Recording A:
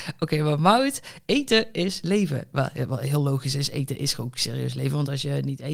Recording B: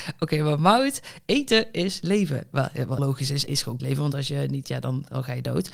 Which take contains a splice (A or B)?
B